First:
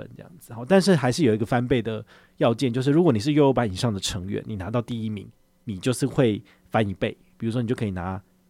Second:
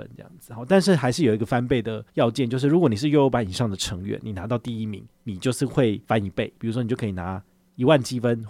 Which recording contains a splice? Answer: second; 4 cuts; at 2.1 s, 5.1 s, 6.0 s, 6.6 s

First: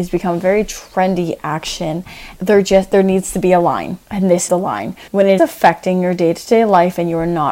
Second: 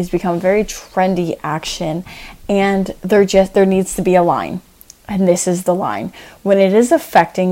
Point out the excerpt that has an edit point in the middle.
first; 5 cuts; at 2.3 s, 4.0 s, 4.5 s, 5.1 s, 5.4 s

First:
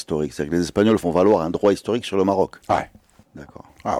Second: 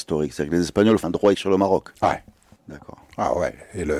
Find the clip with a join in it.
second; 2 cuts; at 1.0 s, 1.3 s

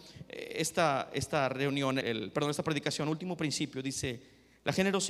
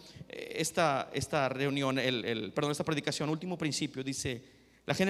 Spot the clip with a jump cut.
first; 1 cut; at 2.0 s

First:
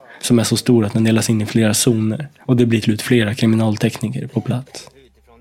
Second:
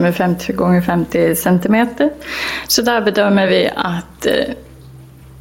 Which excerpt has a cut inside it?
first; 1 cut; at 2.8 s

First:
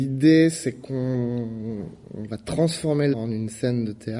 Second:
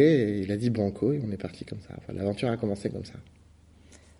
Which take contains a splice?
first; 1 cut; at 3.1 s

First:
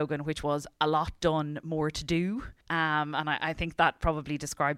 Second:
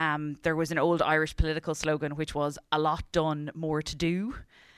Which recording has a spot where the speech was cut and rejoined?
first; 1 cut; at 2.6 s

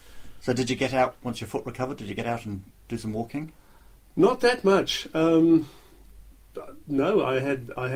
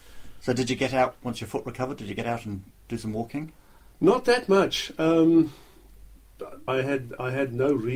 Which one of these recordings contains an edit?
second; 2 cuts; at 3.9 s, 6.7 s

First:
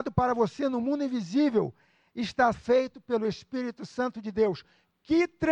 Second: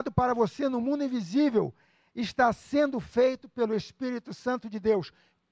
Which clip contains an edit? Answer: first; 1 cut; at 2.5 s

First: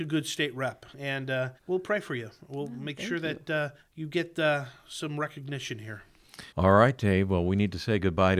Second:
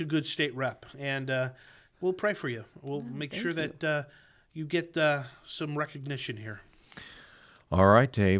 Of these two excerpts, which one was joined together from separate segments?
first; 3 cuts; at 1.6 s, 3.8 s, 6.5 s

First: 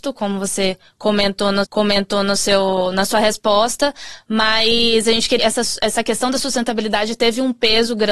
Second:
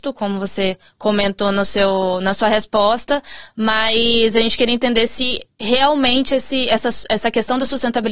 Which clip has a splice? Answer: first; 2 cuts; at 1.6 s, 5.4 s

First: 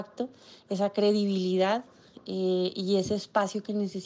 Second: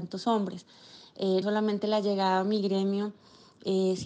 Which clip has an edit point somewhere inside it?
second; 1 cut; at 1.4 s

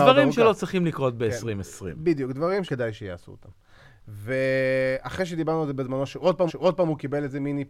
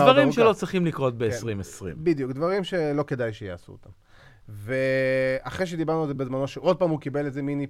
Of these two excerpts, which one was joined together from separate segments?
first; 2 cuts; at 2.6 s, 6.5 s

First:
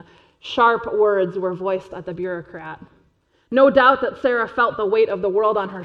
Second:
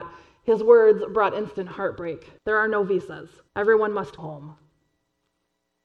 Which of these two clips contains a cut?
second; 3 cuts; at 2.4 s, 3.5 s, 4.2 s

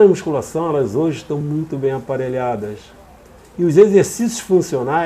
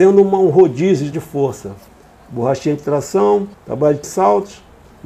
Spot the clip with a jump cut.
second; 3 cuts; at 1.1 s, 3.5 s, 4.0 s

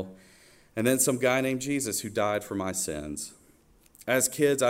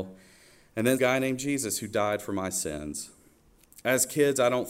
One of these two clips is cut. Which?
second; 1 cut; at 1.0 s

